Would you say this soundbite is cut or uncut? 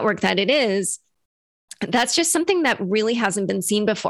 uncut